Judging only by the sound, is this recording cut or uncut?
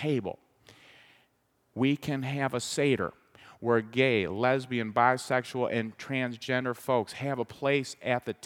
uncut